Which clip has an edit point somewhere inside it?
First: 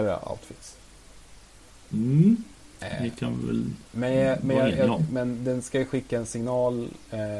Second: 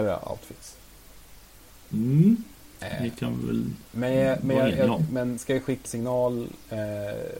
second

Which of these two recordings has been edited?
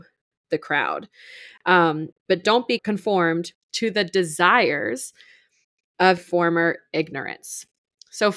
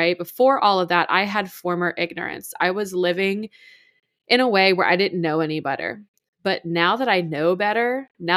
first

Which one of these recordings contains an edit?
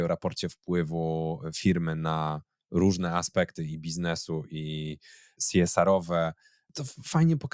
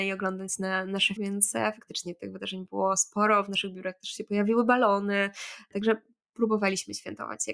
second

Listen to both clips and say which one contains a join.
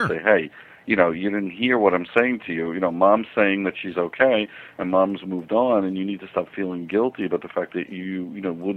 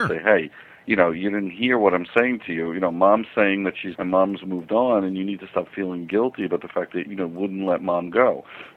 second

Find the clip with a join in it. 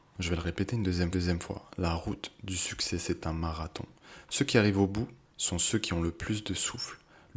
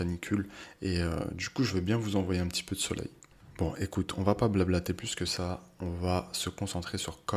first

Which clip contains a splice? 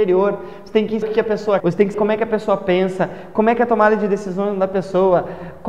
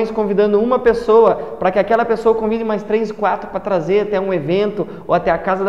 first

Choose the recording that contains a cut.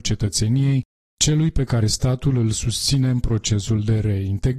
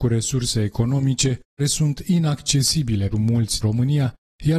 second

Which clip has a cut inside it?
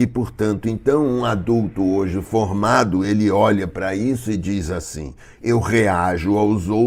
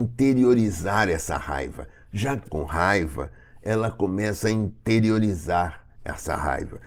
second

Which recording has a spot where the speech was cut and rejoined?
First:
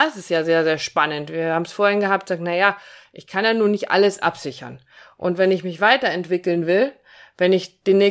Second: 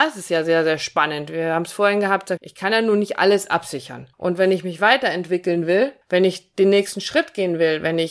second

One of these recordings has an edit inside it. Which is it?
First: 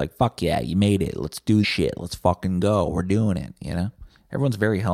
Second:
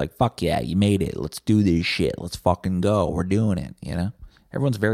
first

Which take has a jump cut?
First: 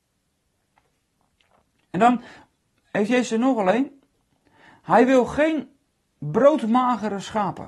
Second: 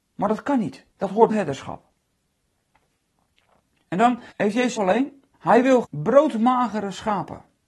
second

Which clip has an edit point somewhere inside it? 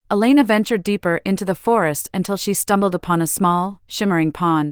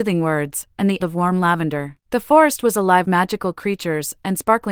second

